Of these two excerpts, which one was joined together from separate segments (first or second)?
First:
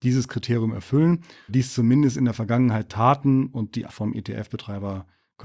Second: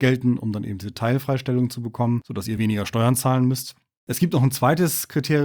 first